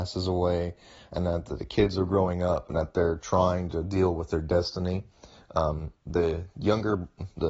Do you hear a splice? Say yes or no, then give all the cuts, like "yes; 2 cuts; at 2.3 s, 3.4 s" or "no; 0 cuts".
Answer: no; 0 cuts